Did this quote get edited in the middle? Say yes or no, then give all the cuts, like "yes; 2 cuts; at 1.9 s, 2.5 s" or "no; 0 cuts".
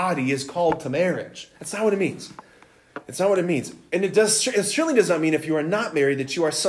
yes; 1 cut; at 1.6 s